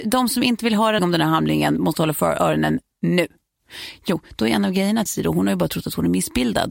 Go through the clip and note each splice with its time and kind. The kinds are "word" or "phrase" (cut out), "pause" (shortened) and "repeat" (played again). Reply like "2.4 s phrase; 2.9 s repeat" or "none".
1.0 s word; 5.1 s word